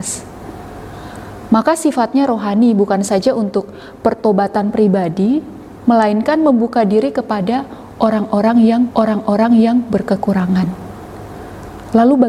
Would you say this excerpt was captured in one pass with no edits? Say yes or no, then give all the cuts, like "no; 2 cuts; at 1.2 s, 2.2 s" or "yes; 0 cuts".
no; 1 cut; at 8.9 s